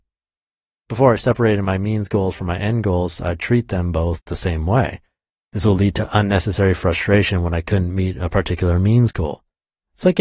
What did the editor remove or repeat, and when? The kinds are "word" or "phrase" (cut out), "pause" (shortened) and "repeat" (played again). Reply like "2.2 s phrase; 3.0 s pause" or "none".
none

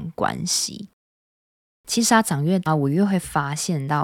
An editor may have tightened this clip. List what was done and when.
2.7 s word

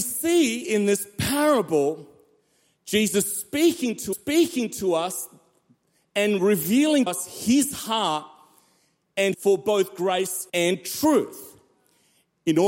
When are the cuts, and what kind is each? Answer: 4.1 s repeat; 7.1 s word; 9.3 s phrase; 10.5 s pause

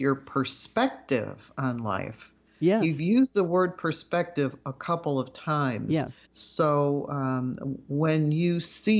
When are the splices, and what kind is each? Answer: 6.2 s pause

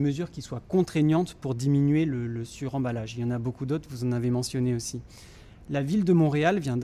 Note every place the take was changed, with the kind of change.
none

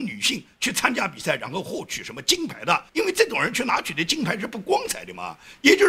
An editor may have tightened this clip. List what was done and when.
2.9 s pause

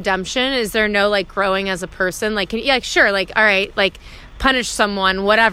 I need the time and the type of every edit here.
none

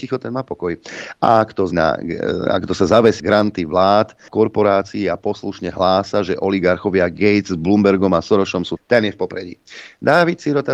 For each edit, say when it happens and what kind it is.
1.7 s word; 3.2 s word; 4.3 s word; 8.8 s word

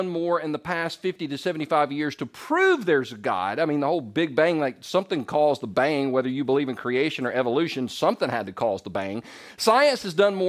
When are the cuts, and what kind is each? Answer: none

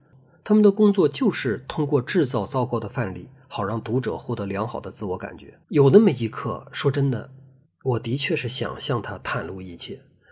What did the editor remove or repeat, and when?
5.6 s pause; 7.7 s pause

